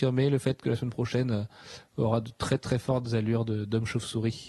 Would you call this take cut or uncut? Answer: uncut